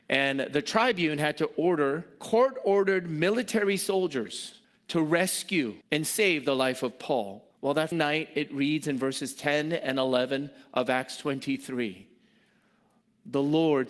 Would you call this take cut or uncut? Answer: cut